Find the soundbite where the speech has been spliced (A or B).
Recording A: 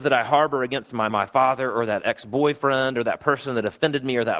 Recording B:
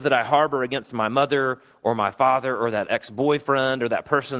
A